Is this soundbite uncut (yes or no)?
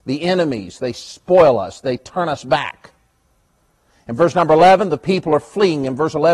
yes